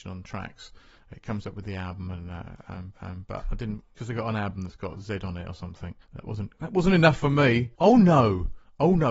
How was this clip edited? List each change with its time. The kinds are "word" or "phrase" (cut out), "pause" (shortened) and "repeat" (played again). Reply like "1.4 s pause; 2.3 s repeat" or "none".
2.9 s repeat; 4.0 s word; 6.0 s pause; 7.7 s pause